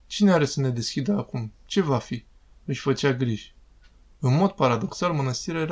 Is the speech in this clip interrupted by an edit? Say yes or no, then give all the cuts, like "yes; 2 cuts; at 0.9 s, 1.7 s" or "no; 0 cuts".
no; 0 cuts